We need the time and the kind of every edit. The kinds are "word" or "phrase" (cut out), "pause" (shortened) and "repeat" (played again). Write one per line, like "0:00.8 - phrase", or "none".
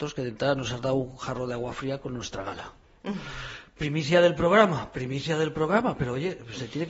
none